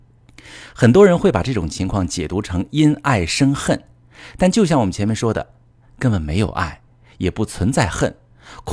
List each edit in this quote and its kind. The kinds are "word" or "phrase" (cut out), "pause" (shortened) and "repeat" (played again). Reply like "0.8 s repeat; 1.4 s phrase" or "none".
none

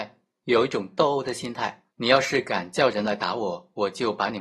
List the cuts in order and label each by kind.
1.9 s pause

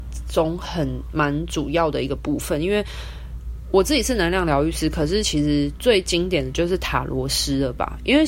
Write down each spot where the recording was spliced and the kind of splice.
none

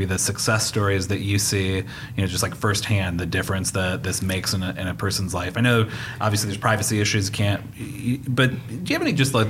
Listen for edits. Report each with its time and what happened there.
none

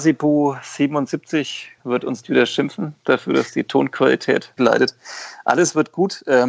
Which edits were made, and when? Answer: 1.8 s word; 2.2 s word; 4.6 s word

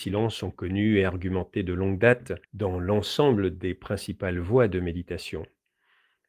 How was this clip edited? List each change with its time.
2.4 s pause

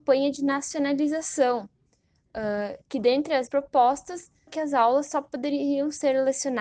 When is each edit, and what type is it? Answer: 3.5 s word; 4.5 s word

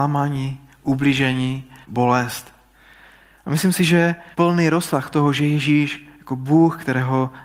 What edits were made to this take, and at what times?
1.8 s pause; 4.3 s pause

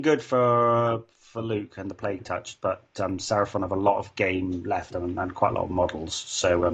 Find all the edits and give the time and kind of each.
none

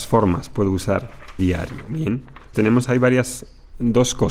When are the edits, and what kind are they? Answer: 1.4 s word; 2.5 s word

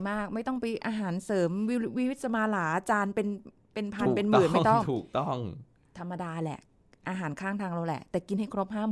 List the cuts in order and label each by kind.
none

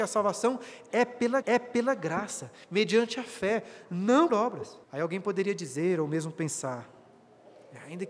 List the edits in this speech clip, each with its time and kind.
1.4 s repeat; 4.3 s word; 4.8 s pause

